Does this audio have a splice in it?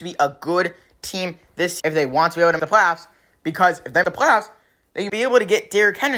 yes; 4 cuts; at 1.8 s, 2.6 s, 4.0 s, 5.1 s

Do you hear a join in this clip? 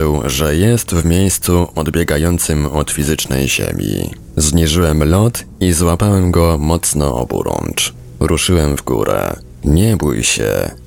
no; 0 cuts

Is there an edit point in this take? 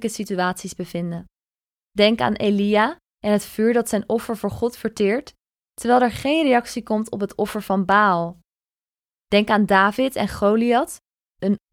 no; 0 cuts

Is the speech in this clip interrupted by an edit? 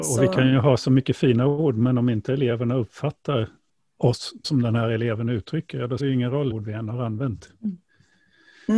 yes; 3 cuts; at 4.4 s, 6.0 s, 6.5 s

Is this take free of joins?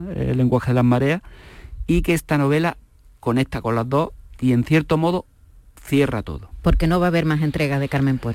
yes; 0 cuts

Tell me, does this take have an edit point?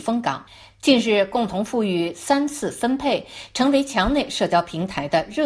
no; 0 cuts

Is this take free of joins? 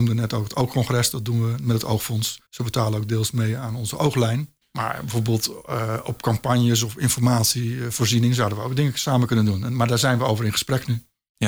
no; 2 cuts; at 2.5 s, 4.6 s

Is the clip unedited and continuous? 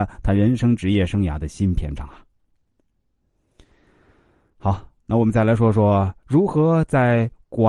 yes; 0 cuts

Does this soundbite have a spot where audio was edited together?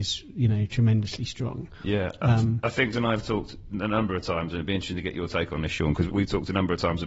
yes; 2 cuts; at 2.9 s, 6.1 s

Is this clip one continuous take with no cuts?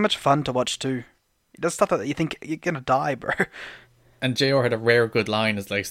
yes; 0 cuts

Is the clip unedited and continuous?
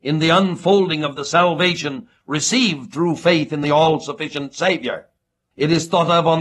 yes; 0 cuts

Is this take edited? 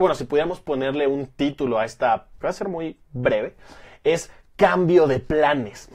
yes; 1 cut; at 2.4 s

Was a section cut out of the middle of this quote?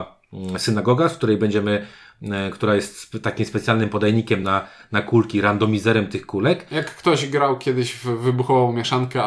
no; 0 cuts

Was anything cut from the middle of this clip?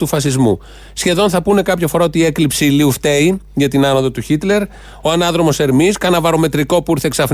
no; 0 cuts

